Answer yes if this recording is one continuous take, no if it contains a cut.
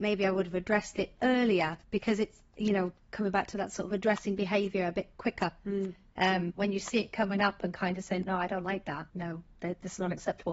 no